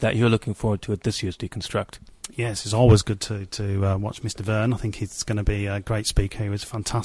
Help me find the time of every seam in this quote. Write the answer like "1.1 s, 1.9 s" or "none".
none